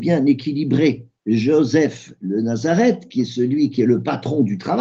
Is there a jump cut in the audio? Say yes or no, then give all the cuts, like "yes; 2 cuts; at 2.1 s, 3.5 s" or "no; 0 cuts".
yes; 1 cut; at 1.2 s